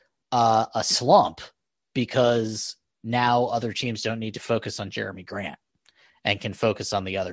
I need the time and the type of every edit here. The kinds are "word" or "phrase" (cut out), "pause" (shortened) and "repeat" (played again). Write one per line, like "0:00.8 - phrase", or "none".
none